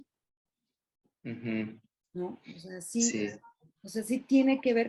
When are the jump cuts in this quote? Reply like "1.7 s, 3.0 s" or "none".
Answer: none